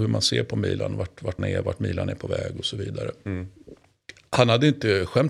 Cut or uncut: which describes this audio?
cut